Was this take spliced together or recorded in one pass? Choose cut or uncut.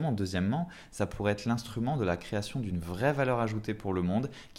uncut